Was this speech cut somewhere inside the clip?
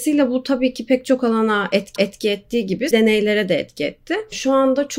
yes; 2 cuts; at 2.0 s, 2.9 s

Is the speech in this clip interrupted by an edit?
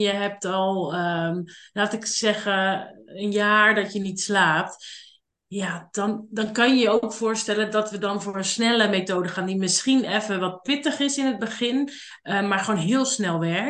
no; 0 cuts

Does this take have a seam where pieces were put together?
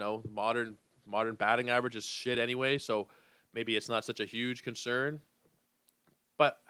no; 0 cuts

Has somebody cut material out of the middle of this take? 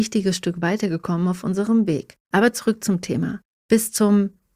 yes; 2 cuts; at 2.2 s, 3.5 s

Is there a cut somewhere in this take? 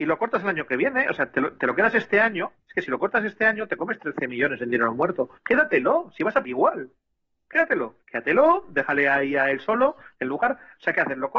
yes; 3 cuts; at 5.4 s, 6.4 s, 8.0 s

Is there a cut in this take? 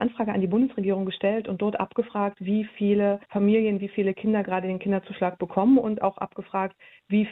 yes; 1 cut; at 3.2 s

